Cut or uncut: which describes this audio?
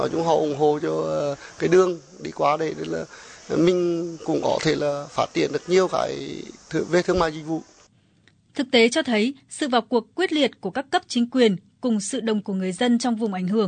cut